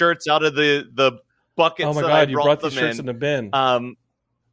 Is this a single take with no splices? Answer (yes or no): yes